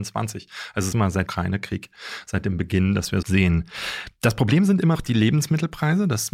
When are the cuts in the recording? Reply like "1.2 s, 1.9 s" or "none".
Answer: 0.9 s, 1.3 s, 3.2 s, 4.9 s